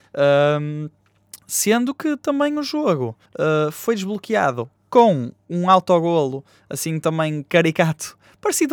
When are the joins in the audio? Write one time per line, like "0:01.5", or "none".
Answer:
0:03.3